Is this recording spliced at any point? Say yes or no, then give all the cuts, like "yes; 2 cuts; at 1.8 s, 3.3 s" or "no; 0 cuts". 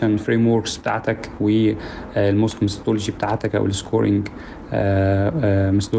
yes; 1 cut; at 1.4 s